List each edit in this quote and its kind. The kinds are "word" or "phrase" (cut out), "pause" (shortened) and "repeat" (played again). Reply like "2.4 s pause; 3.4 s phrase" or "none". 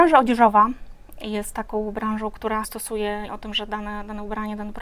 2.6 s word; 3.3 s word